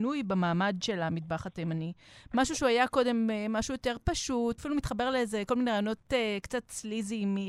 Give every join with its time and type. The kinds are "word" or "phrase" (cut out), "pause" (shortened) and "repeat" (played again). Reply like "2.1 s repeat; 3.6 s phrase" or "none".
4.6 s word